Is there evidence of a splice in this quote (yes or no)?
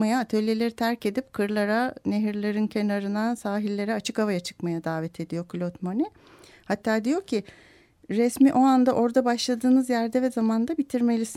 no